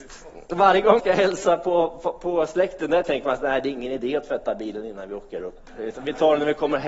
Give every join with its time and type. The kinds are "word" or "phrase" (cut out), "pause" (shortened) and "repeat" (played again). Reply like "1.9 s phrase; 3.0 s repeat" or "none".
1.0 s word